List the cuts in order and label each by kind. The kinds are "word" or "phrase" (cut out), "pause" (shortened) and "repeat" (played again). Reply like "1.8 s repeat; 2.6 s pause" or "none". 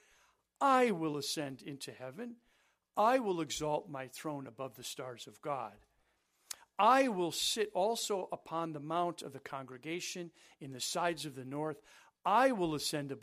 none